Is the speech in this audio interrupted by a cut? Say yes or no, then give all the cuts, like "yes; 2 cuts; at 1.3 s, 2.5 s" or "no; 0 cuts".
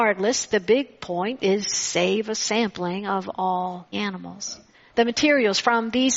yes; 2 cuts; at 3.9 s, 4.7 s